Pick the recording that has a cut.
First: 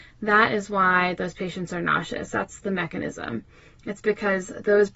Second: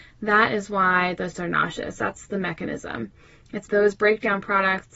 second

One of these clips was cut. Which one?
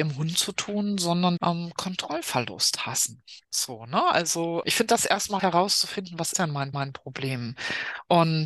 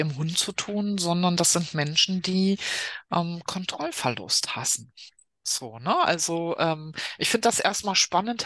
first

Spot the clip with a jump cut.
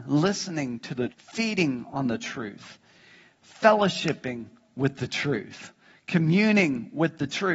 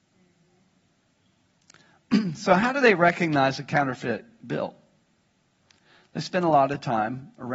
first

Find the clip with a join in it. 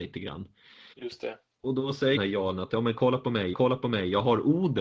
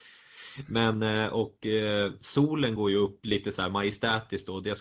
first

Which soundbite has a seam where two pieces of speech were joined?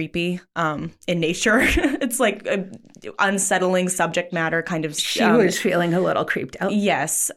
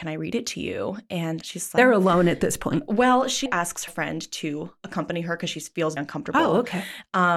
second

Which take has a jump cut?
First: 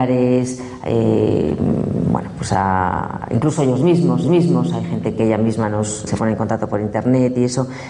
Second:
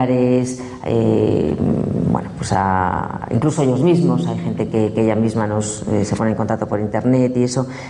first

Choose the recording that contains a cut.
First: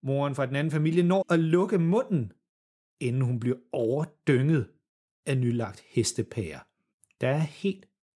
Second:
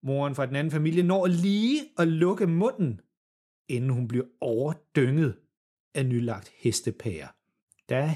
first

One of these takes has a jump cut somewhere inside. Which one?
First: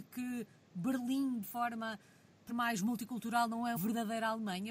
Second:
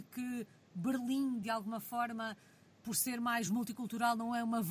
first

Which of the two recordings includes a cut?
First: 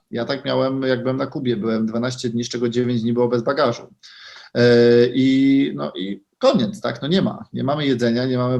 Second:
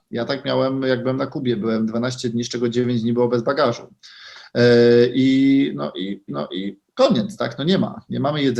second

